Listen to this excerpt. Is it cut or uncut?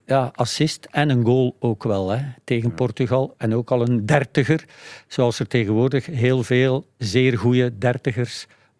uncut